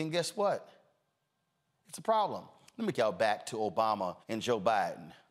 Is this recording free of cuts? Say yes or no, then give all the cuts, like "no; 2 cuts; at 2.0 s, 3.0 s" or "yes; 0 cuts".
no; 2 cuts; at 2.9 s, 4.2 s